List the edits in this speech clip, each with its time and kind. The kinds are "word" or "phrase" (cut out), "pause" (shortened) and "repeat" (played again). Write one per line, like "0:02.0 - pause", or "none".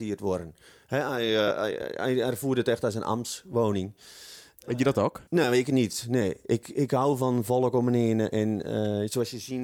0:05.3 - pause